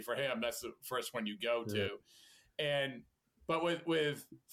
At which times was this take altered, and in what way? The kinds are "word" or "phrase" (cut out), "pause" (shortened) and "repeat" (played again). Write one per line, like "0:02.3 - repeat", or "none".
none